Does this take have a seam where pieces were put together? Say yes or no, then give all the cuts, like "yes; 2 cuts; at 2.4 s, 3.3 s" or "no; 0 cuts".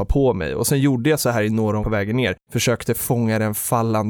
yes; 1 cut; at 1.8 s